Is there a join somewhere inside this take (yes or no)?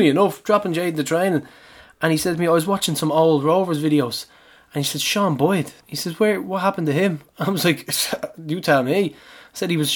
yes